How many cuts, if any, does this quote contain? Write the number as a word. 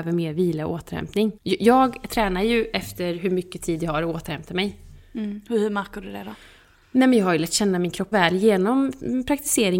two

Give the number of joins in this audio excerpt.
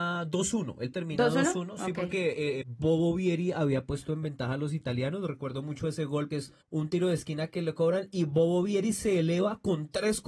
four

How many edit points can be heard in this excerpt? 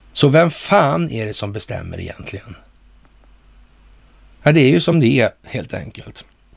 zero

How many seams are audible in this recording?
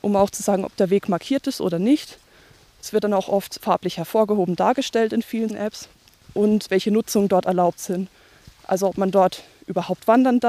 three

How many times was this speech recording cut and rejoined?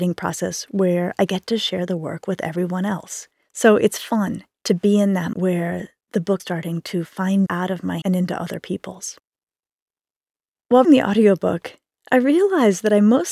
six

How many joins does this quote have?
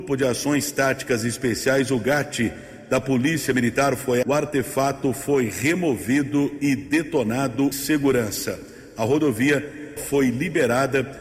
three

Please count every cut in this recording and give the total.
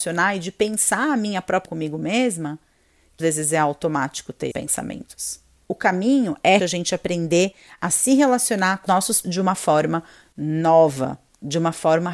six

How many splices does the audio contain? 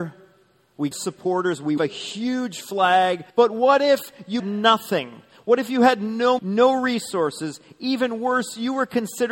five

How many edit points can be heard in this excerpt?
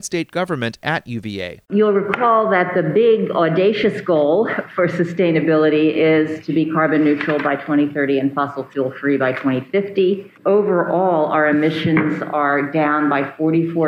two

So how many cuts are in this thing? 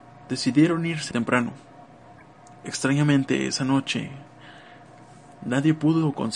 one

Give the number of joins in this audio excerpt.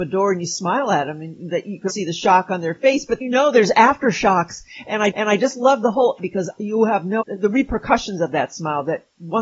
five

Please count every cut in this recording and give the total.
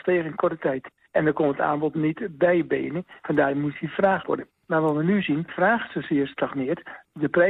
two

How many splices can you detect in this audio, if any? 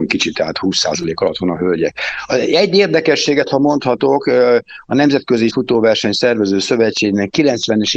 one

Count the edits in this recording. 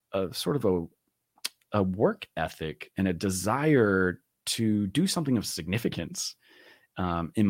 zero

